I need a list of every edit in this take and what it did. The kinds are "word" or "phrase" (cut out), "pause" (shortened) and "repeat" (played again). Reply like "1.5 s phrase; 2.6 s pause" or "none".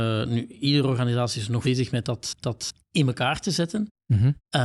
1.6 s word; 2.4 s repeat